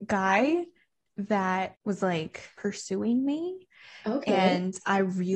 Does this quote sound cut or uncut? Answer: cut